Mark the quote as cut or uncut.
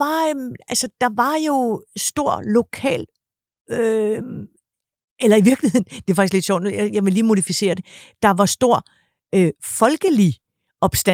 uncut